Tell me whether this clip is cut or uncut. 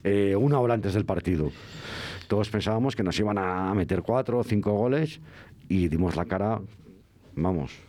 uncut